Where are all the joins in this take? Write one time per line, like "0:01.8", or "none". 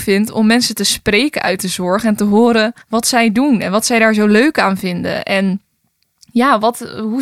0:02.8